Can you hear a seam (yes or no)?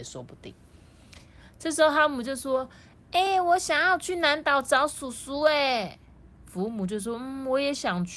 no